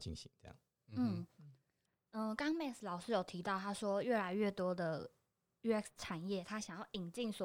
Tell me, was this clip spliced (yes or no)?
no